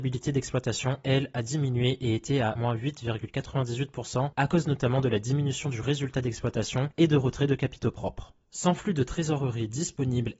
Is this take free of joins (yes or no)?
yes